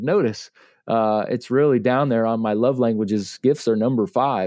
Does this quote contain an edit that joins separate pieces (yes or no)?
no